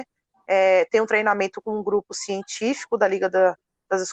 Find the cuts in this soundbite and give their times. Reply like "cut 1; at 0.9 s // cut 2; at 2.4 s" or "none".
none